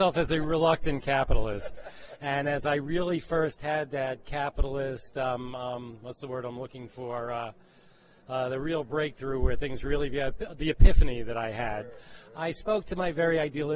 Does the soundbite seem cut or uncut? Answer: uncut